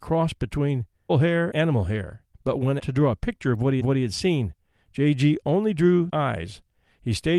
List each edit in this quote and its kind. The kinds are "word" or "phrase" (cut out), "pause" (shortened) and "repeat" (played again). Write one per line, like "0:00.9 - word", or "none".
0:01.1 - word
0:01.5 - word
0:02.3 - pause
0:02.8 - word
0:03.8 - repeat
0:06.1 - word